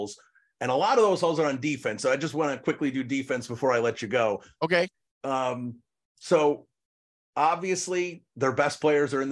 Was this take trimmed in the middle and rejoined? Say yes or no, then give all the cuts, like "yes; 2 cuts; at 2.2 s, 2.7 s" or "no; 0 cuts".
no; 0 cuts